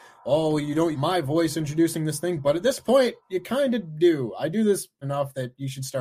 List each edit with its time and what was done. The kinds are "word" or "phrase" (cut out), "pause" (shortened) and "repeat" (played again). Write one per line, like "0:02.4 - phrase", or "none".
0:00.9 - phrase
0:03.2 - pause
0:05.0 - word